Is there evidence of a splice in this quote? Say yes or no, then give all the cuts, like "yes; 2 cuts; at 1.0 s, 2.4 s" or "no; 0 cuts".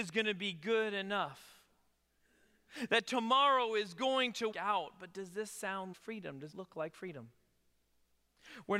yes; 3 cuts; at 4.5 s, 5.9 s, 6.5 s